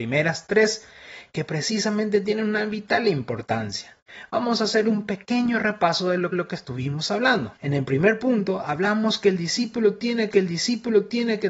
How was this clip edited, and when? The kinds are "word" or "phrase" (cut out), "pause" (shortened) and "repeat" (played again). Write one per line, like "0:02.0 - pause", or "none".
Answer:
0:06.3 - repeat
0:07.6 - pause
0:10.3 - repeat